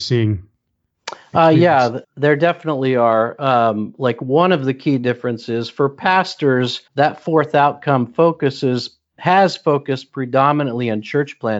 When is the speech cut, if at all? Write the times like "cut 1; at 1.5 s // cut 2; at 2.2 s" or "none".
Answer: cut 1; at 2.0 s // cut 2; at 6.9 s